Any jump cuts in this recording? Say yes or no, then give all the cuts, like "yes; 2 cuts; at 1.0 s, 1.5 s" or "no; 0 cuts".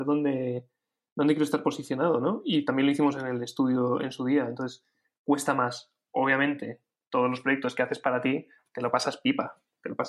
no; 0 cuts